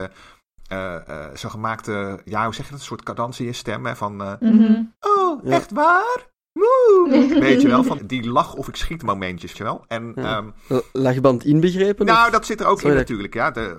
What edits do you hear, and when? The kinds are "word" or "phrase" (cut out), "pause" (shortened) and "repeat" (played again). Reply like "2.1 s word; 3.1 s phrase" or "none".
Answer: 8.0 s word; 9.5 s word